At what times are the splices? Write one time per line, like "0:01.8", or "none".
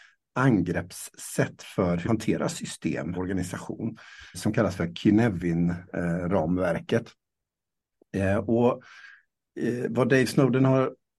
0:02.0
0:03.1
0:04.3